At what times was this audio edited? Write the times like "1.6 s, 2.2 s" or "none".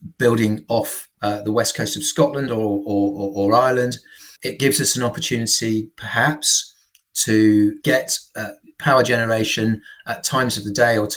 1.1 s, 4.3 s, 7.8 s